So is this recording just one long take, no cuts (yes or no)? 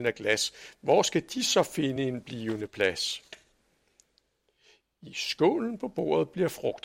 yes